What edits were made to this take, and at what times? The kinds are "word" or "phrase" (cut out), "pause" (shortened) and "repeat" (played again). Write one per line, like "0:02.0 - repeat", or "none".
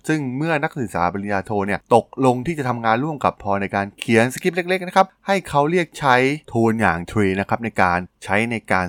0:06.4 - pause
0:07.1 - word